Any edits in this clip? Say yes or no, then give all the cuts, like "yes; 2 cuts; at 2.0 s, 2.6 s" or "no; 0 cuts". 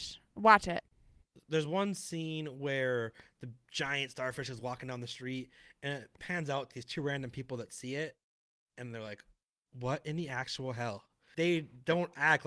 yes; 2 cuts; at 6.7 s, 11.3 s